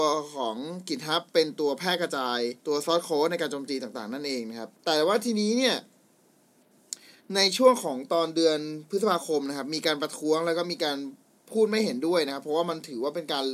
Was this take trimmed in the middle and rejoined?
yes; 2 cuts; at 2.6 s, 4.7 s

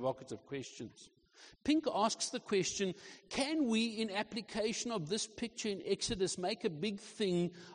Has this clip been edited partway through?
no; 0 cuts

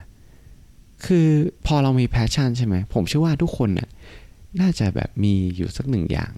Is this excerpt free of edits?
no; 1 cut; at 1.6 s

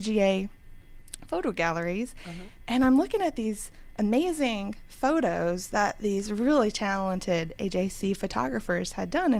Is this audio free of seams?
yes; 0 cuts

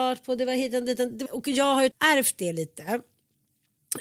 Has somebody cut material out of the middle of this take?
yes; 2 cuts; at 1.3 s, 1.9 s

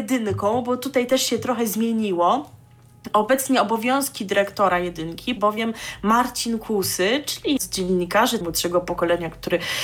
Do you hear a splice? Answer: yes; 3 cuts; at 5.4 s, 7.6 s, 8.4 s

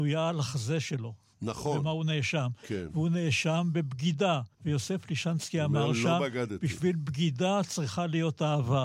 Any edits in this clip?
yes; 1 cut; at 4.5 s

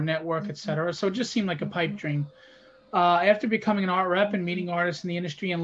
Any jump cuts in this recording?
no; 0 cuts

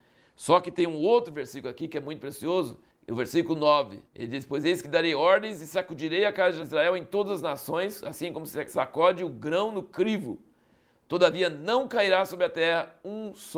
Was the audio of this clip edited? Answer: yes; 2 cuts; at 2.9 s, 4.1 s

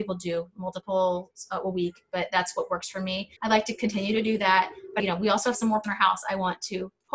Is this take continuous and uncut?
no; 3 cuts; at 3.4 s, 5.0 s, 5.8 s

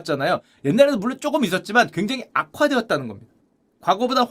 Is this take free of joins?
yes; 0 cuts

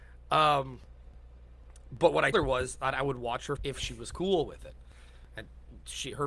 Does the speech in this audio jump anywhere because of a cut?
yes; 2 cuts; at 2.3 s, 3.6 s

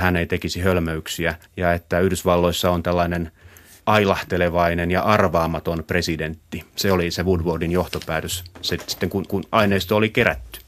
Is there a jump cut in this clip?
yes; 4 cuts; at 1.5 s, 3.8 s, 6.7 s, 9.3 s

